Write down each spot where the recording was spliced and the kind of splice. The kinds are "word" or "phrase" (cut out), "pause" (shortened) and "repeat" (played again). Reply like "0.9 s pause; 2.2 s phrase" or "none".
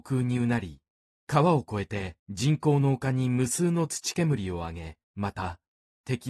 2.2 s pause; 5.0 s pause